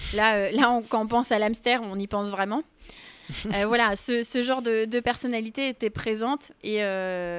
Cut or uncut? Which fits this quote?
uncut